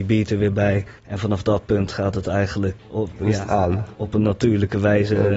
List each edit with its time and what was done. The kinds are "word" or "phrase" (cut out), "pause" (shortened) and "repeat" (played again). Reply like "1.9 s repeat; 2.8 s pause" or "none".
1.0 s pause; 2.8 s word

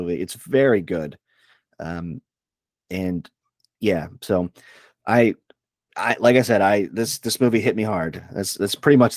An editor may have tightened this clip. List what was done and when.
none

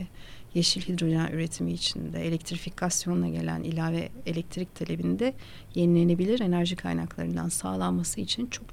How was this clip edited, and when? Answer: none

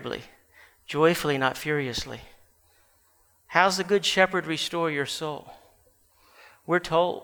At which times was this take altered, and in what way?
none

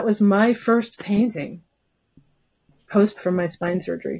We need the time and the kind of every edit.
3.1 s word

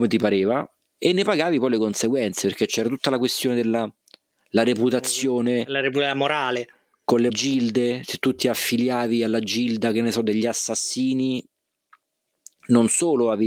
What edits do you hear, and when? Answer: 7.3 s word

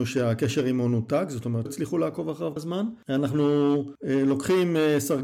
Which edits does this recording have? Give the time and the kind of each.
1.7 s word; 2.6 s word

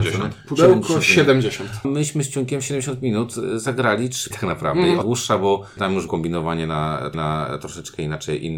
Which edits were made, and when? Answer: 1.8 s word; 4.3 s word; 5.0 s phrase; 5.8 s word; 6.1 s word; 7.1 s repeat

